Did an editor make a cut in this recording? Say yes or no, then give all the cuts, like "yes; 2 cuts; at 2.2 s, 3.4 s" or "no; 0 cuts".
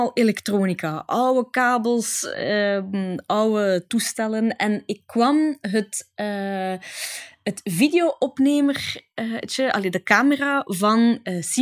no; 0 cuts